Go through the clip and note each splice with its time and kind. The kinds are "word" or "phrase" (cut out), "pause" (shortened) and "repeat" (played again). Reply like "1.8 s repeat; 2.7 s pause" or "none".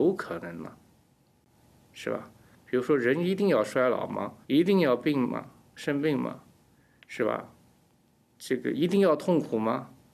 4.4 s pause